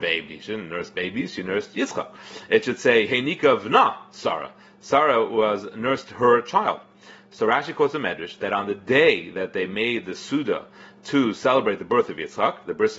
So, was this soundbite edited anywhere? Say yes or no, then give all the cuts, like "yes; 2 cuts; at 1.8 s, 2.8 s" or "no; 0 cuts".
no; 0 cuts